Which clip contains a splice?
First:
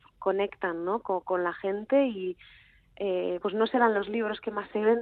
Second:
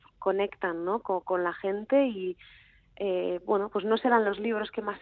first; 1 cut; at 3.4 s

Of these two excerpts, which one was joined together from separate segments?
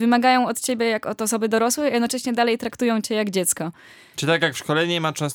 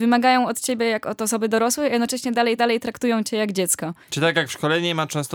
second; 2 cuts; at 2.6 s, 4.0 s

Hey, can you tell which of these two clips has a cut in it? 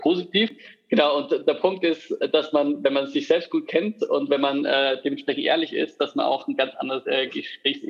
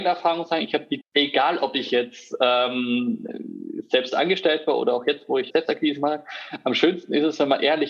second; 2 cuts; at 1.0 s, 5.5 s

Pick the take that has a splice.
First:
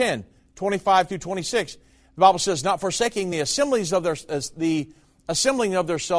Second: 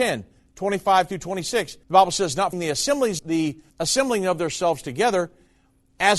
second; 4 cuts; at 1.8 s, 2.5 s, 3.2 s, 3.7 s

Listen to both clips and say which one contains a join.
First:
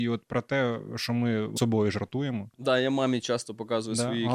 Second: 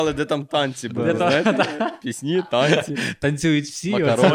first; 1 cut; at 1.6 s

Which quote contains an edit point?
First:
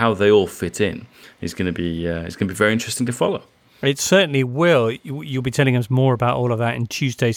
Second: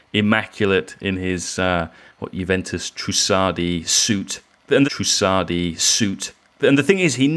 second; 1 cut; at 4.8 s

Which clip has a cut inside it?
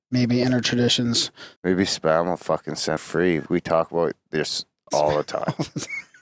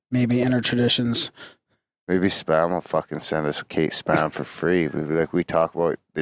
first; 3 cuts; at 1.6 s, 3.0 s, 3.5 s

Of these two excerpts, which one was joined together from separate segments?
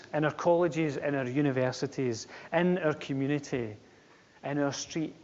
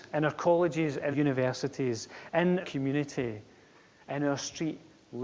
second; 2 cuts; at 1.1 s, 2.6 s

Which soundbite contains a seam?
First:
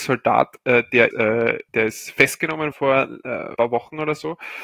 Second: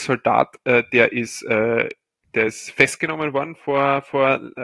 first; 4 cuts; at 1.1 s, 1.7 s, 2.7 s, 3.5 s

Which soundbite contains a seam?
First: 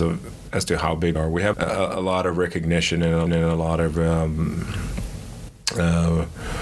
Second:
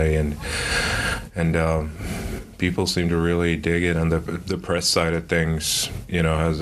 first; 3 cuts; at 1.1 s, 1.5 s, 3.3 s

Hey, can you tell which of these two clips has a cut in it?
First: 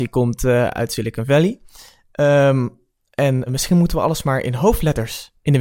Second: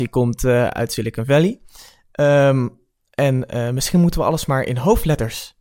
first; 1 cut; at 3.5 s

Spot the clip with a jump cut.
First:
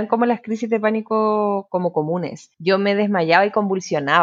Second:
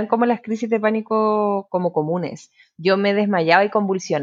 first; 1 cut; at 2.5 s

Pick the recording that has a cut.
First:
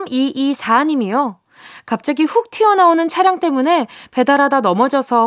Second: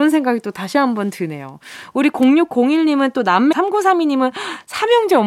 second; 1 cut; at 3.5 s

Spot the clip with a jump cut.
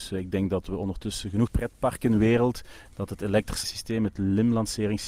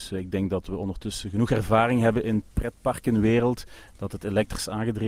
first; 2 cuts; at 1.5 s, 3.6 s

